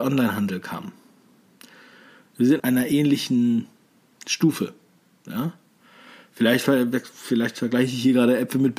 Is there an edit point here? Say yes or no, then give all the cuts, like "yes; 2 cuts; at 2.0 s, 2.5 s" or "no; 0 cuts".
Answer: yes; 1 cut; at 2.6 s